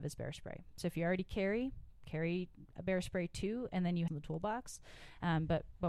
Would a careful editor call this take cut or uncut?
cut